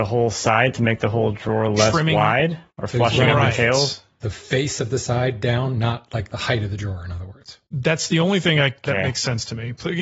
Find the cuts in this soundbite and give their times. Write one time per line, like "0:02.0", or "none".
0:02.7
0:07.7